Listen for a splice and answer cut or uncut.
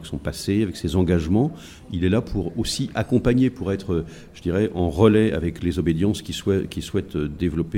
uncut